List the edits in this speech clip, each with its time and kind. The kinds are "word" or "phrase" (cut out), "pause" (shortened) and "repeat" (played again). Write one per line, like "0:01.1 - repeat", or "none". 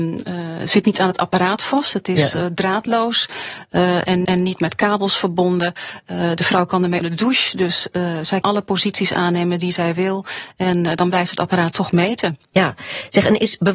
0:04.2 - repeat
0:07.0 - word
0:08.4 - word
0:11.9 - word
0:12.5 - pause